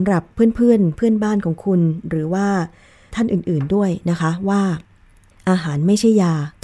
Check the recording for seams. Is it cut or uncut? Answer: uncut